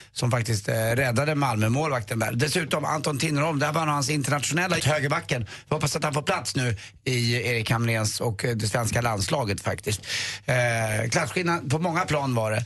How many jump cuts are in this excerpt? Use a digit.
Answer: 1